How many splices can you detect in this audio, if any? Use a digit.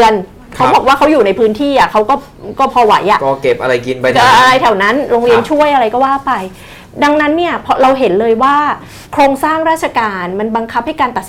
1